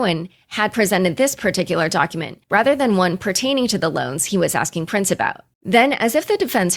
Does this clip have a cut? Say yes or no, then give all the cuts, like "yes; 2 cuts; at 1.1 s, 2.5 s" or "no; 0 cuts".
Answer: yes; 2 cuts; at 2.4 s, 5.5 s